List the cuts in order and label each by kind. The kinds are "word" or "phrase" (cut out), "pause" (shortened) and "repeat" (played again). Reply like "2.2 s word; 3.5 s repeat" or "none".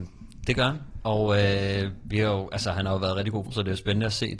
3.5 s word